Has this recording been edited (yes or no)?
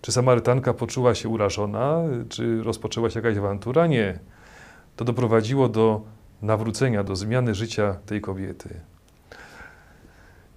no